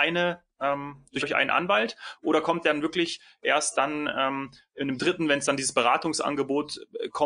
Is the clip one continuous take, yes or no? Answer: no